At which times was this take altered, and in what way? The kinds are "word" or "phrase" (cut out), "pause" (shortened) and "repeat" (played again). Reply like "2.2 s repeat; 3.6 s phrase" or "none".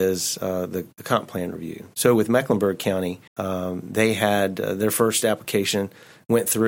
3.3 s pause